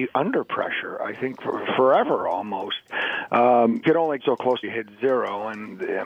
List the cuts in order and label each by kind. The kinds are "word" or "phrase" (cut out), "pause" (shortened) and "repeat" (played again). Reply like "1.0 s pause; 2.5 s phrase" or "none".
3.8 s phrase; 4.2 s word; 4.6 s phrase

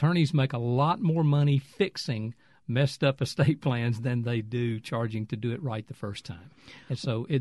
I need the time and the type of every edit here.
none

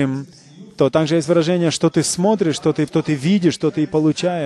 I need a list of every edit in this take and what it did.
2.9 s word

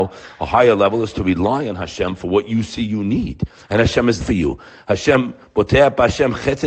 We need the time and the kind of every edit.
4.2 s word

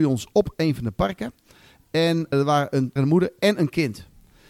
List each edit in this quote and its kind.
2.3 s word; 3.0 s word

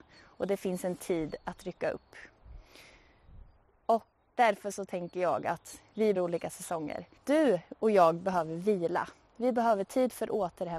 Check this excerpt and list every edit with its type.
4.2 s word; 6.1 s word; 7.2 s pause

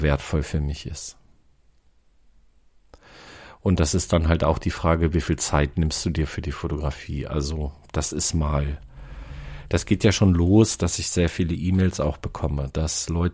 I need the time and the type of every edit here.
none

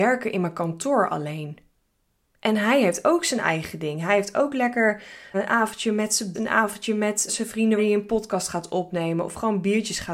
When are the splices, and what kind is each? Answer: 5.3 s word; 6.3 s word; 7.3 s word; 7.8 s word

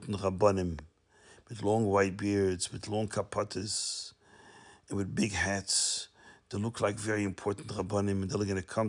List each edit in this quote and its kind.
none

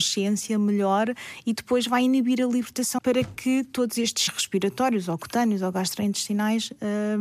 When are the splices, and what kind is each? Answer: 3.0 s phrase; 4.3 s word

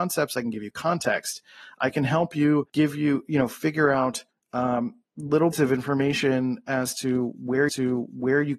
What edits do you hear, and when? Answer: 2.7 s pause; 4.3 s pause; 5.5 s word; 7.7 s repeat

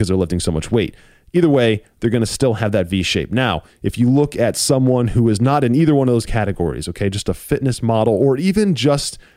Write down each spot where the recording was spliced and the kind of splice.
none

